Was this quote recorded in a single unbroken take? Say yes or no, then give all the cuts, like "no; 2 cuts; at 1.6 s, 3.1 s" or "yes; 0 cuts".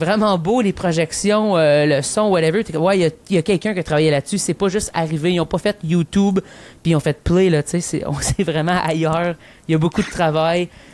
yes; 0 cuts